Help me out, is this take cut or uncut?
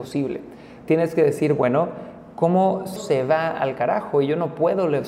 cut